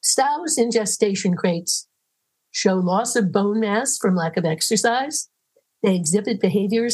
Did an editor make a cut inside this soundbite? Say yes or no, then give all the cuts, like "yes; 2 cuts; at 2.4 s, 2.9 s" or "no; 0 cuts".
no; 0 cuts